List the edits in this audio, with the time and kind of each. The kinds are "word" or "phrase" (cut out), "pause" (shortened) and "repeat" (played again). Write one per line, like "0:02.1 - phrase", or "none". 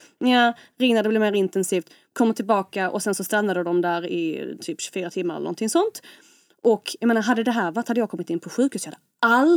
none

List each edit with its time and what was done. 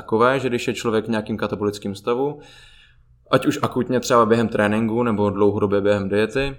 none

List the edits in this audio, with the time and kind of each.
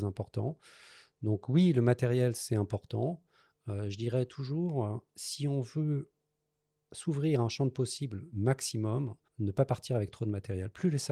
0:09.3 - pause

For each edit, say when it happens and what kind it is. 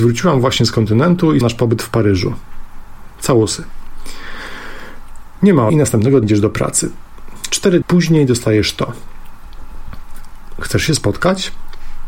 0:01.4 - word
0:05.7 - word
0:06.2 - word
0:07.8 - word

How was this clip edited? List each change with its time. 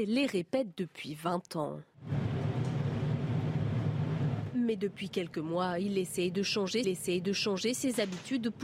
0:06.8 - repeat

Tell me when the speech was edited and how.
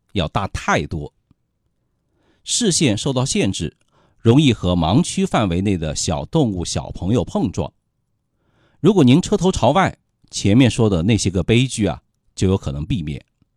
none

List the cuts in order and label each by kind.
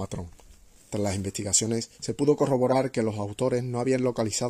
0:01.9 - pause

